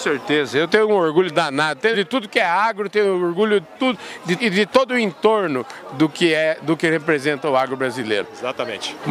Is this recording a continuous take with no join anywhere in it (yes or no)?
no